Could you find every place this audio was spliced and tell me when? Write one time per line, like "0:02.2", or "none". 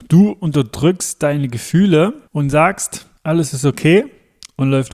0:02.3
0:03.2